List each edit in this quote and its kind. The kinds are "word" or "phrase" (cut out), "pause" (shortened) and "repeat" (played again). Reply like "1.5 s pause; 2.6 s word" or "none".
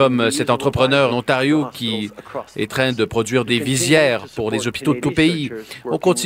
1.1 s word; 2.7 s word; 3.5 s word; 5.0 s word

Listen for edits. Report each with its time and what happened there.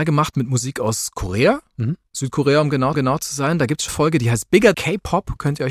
2.9 s repeat; 3.9 s word; 4.7 s word

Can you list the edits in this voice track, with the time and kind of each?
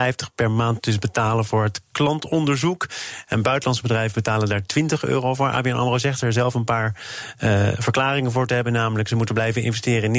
none

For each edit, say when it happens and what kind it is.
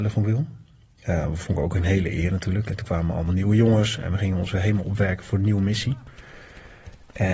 none

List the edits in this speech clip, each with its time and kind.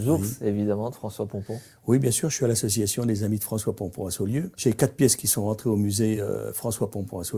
none

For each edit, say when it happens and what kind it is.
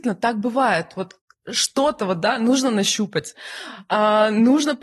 none

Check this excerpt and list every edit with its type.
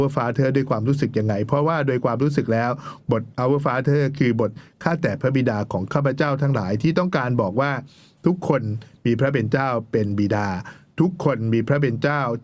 none

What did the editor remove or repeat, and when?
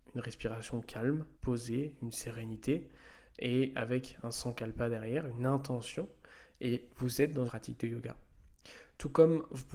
1.3 s pause; 7.5 s word

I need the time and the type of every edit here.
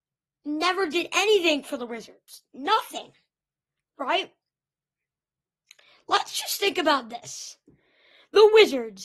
none

